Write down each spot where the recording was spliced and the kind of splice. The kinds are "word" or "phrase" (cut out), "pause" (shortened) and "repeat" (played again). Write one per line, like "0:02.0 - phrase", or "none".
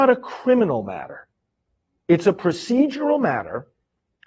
none